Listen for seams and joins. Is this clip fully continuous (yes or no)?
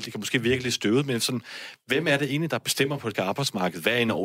no